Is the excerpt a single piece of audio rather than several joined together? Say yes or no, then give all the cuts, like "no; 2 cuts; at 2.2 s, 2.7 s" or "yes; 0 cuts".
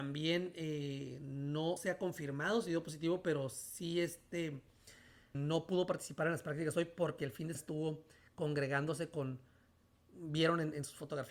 no; 3 cuts; at 1.8 s, 5.3 s, 7.5 s